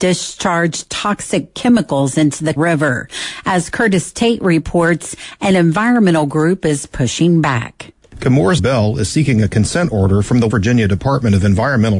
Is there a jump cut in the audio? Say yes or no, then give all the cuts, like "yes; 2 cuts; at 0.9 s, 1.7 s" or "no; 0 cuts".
yes; 3 cuts; at 2.6 s, 8.6 s, 10.5 s